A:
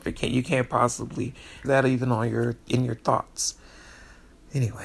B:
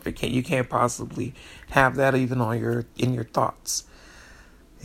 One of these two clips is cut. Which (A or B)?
A